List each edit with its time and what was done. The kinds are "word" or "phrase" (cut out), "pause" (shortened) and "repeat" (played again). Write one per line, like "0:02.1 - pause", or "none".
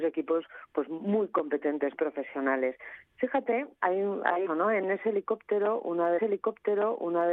0:01.9 - word
0:04.5 - phrase
0:06.2 - repeat